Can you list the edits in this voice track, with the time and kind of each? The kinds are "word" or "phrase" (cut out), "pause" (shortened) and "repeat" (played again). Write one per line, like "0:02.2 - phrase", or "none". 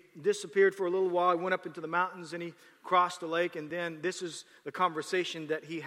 none